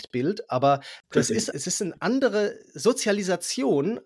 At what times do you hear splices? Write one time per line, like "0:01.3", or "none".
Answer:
0:01.0
0:01.5
0:02.0